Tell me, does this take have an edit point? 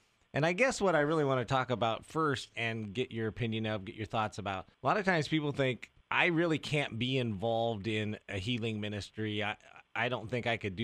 yes; 4 cuts; at 2.5 s, 4.7 s, 6.0 s, 8.2 s

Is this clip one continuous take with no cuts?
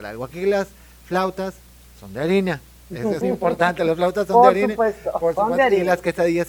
no; 1 cut; at 3.2 s

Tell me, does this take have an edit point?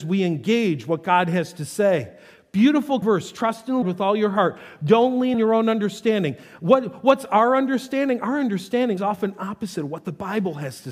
yes; 4 cuts; at 3.0 s, 3.8 s, 5.3 s, 9.0 s

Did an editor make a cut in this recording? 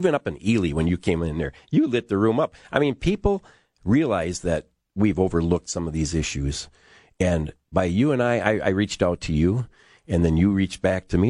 no; 0 cuts

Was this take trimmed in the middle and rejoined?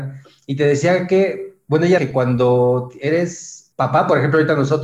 yes; 2 cuts; at 2.0 s, 3.7 s

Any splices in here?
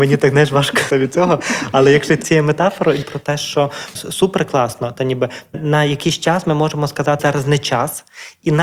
yes; 6 cuts; at 0.9 s, 2.2 s, 3.0 s, 3.9 s, 5.5 s, 7.2 s

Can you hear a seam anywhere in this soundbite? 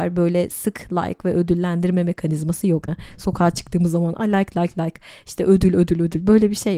yes; 2 cuts; at 2.9 s, 4.5 s

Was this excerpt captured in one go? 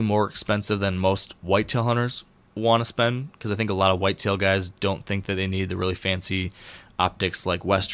yes; 0 cuts

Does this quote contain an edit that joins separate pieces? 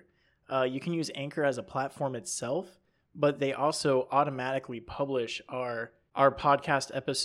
no; 0 cuts

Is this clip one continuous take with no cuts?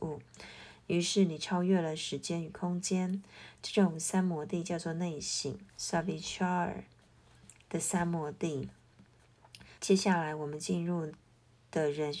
no; 2 cuts; at 5.7 s, 9.8 s

